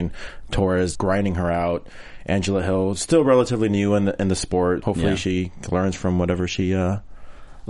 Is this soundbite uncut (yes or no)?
no